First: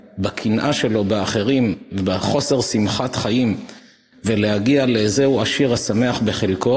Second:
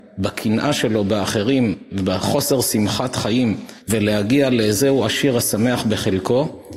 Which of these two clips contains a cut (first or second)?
second